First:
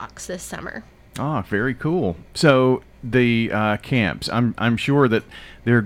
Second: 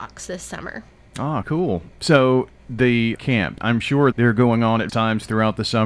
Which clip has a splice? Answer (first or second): second